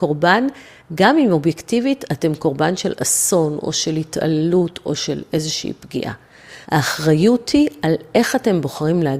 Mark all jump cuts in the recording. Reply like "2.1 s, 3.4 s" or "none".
6.6 s